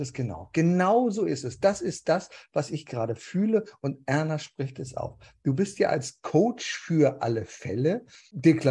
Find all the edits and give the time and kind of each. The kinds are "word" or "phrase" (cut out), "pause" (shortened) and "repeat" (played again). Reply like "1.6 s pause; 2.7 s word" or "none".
none